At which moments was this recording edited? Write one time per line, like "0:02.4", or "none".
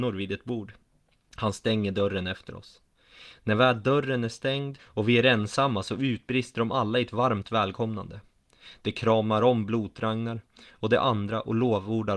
0:04.8